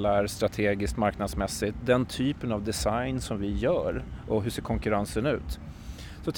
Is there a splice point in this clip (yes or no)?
no